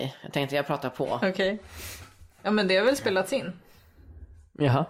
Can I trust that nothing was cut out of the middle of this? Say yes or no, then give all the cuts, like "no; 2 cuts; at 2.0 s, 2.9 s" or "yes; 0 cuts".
yes; 0 cuts